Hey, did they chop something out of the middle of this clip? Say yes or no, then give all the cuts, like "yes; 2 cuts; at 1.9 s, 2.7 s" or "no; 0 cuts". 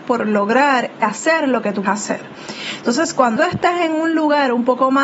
yes; 3 cuts; at 1.0 s, 1.9 s, 3.4 s